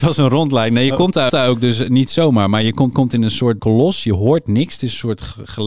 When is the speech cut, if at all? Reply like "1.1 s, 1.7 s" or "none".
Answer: 1.3 s, 2.9 s, 3.6 s